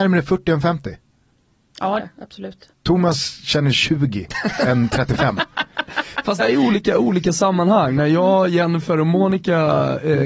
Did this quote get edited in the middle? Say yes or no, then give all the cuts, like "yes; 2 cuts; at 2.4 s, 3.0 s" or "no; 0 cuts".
yes; 4 cuts; at 2.0 s, 2.7 s, 3.7 s, 6.4 s